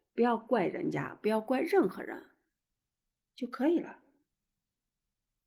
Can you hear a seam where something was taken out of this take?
no; 0 cuts

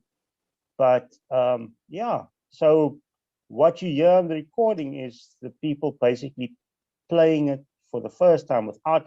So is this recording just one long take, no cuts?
yes; 0 cuts

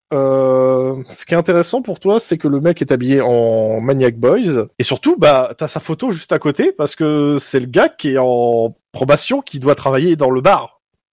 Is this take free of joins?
no; 1 cut; at 4.7 s

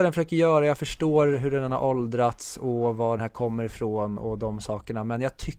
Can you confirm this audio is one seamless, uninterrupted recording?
no; 1 cut; at 3.2 s

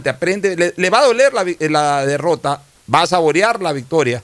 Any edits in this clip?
no; 0 cuts

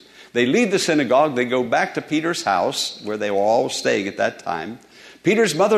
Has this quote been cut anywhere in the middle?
no; 0 cuts

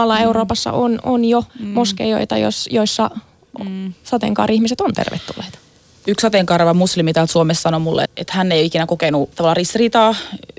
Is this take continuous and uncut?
no; 3 cuts; at 1.5 s, 8.1 s, 9.3 s

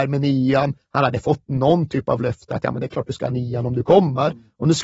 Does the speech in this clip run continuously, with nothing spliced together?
yes; 0 cuts

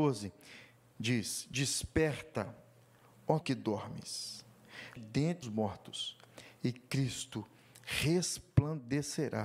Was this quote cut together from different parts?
yes; 3 cuts; at 3.4 s, 5.0 s, 5.4 s

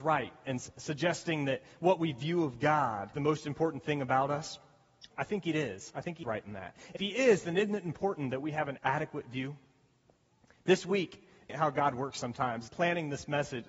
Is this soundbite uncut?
no; 7 cuts; at 3.1 s, 5.1 s, 6.2 s, 7.0 s, 8.8 s, 11.5 s, 12.7 s

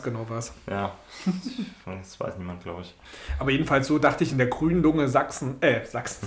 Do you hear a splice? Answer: no; 0 cuts

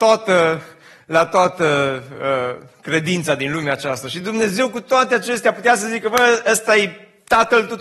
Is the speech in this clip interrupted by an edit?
no; 0 cuts

